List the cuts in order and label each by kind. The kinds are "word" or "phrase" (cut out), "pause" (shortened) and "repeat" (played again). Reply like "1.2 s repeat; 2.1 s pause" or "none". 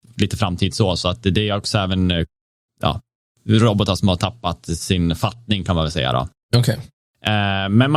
none